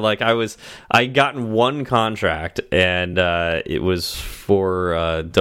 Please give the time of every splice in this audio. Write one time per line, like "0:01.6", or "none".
none